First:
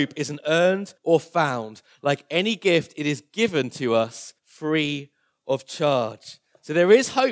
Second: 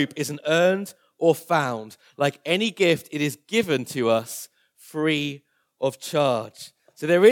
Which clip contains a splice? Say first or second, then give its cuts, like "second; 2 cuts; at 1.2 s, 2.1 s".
first; 2 cuts; at 1.0 s, 4.4 s